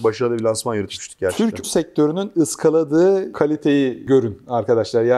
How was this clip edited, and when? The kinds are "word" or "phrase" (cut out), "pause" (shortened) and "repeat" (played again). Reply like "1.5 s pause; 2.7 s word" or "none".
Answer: 1.6 s word